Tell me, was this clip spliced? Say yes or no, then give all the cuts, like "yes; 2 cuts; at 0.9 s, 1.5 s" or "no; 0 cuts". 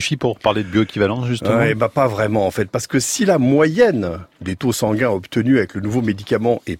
no; 0 cuts